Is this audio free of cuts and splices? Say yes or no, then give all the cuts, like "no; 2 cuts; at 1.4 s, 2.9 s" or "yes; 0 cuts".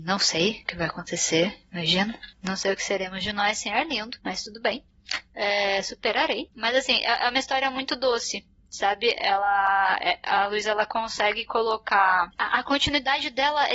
yes; 0 cuts